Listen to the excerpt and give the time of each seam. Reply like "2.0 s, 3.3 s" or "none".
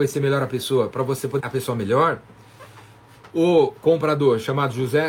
1.4 s, 3.3 s